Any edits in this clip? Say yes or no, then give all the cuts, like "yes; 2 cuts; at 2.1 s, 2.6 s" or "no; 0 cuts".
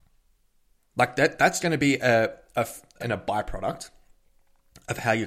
yes; 2 cuts; at 1.6 s, 3.0 s